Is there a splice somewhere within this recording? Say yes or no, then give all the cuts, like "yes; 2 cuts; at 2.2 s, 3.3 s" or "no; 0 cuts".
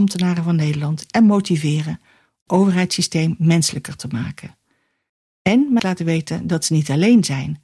yes; 3 cuts; at 1.1 s, 2.5 s, 5.8 s